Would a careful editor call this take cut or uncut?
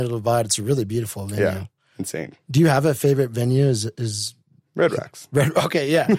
uncut